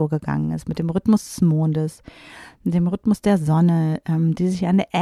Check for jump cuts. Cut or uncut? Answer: uncut